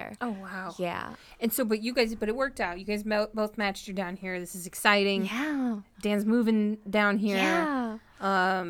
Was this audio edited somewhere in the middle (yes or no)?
no